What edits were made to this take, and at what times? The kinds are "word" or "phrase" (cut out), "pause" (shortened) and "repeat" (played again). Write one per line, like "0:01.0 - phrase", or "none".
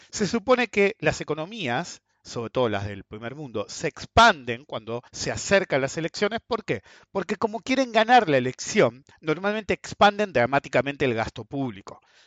0:05.1 - pause